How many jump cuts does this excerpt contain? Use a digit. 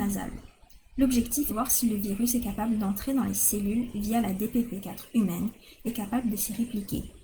2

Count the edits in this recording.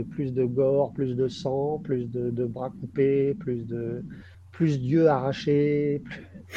1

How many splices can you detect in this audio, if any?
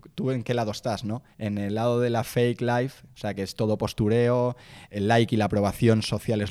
3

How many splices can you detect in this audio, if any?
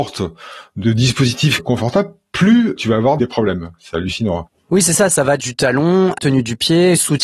1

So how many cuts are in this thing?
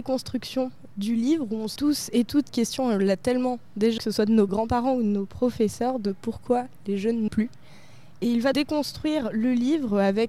6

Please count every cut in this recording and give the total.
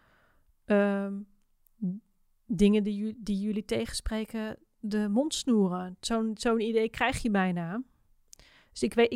0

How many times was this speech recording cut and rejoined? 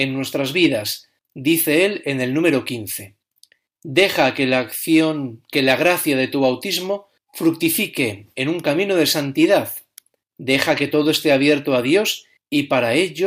0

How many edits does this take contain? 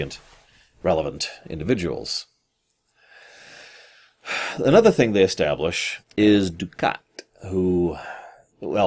1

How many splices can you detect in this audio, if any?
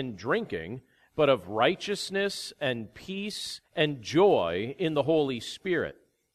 1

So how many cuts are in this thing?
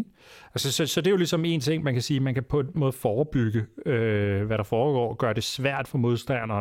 1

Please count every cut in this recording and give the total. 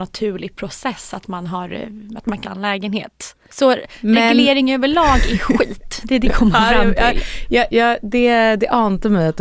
3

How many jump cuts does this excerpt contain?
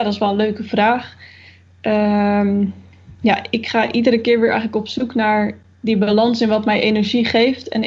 0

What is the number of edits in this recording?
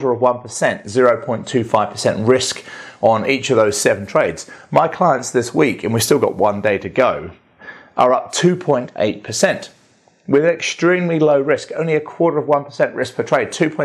0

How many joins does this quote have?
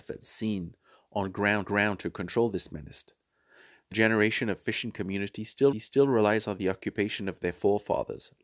3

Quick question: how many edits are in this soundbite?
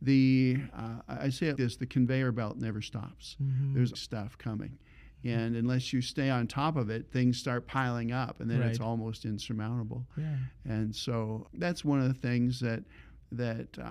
3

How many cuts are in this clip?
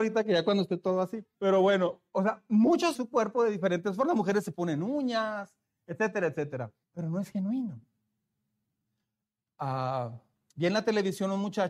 4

